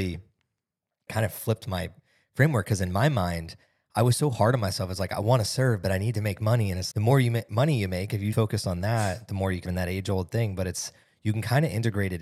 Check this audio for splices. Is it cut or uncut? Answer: cut